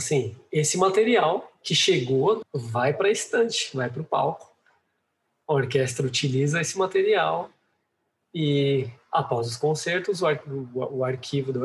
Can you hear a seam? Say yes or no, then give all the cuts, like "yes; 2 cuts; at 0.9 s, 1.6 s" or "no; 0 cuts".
yes; 1 cut; at 2.4 s